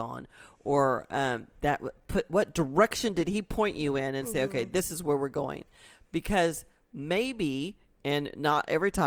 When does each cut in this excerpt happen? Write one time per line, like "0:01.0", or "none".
none